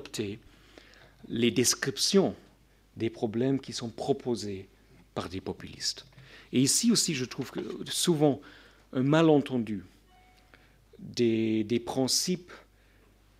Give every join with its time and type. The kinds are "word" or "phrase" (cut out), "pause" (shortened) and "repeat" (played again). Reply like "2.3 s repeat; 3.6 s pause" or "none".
none